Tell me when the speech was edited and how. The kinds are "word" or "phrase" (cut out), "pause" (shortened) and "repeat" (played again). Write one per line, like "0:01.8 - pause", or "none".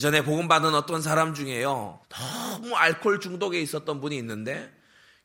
0:02.0 - pause